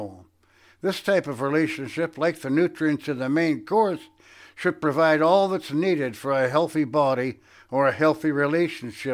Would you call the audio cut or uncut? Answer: uncut